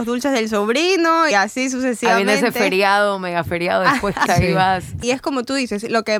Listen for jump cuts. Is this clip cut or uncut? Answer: cut